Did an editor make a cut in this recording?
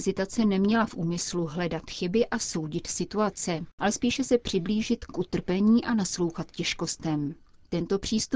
no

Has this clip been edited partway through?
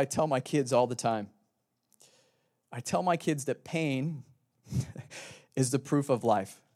no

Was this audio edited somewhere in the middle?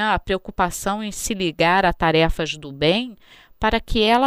no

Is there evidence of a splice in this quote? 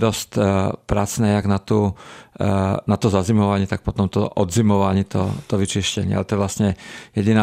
no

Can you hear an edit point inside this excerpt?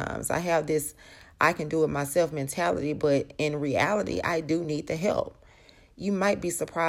no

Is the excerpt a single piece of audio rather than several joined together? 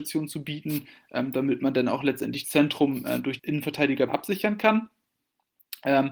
no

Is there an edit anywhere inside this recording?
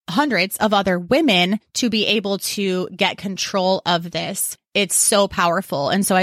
yes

